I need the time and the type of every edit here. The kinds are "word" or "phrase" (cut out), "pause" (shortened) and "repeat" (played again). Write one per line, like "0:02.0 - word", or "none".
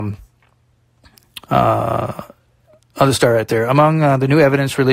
0:01.4 - pause